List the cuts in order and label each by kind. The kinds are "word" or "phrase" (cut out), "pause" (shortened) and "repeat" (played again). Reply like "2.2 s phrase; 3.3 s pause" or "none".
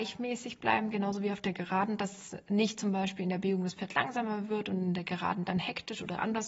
none

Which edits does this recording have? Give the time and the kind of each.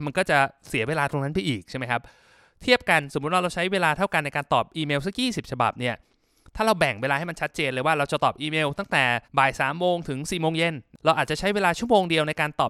9.3 s pause

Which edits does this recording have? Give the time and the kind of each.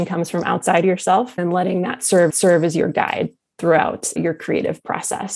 1.4 s word; 2.3 s repeat; 4.2 s word

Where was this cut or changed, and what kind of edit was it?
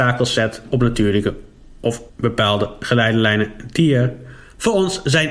2.1 s pause

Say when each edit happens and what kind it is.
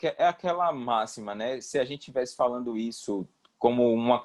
none

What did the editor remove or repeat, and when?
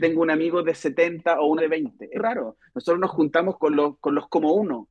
1.6 s word; 2.1 s word; 3.6 s word

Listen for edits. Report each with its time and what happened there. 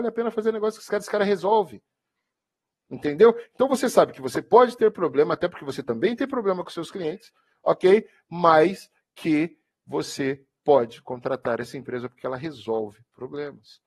none

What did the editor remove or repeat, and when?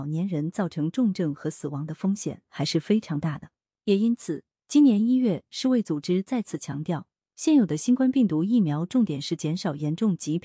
none

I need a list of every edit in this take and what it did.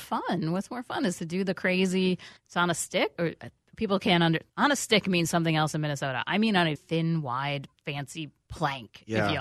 2.4 s pause; 3.1 s word; 4.5 s pause; 6.8 s word

